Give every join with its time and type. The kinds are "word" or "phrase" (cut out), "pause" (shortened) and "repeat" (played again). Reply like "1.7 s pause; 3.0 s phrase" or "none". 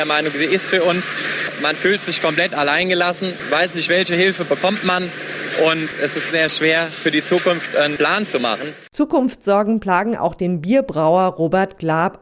6.3 s word